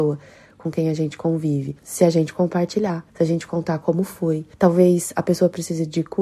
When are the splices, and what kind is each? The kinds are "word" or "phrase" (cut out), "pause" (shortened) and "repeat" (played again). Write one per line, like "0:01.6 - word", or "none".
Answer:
0:01.8 - pause
0:03.1 - pause
0:04.5 - pause